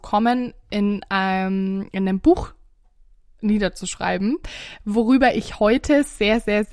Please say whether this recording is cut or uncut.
uncut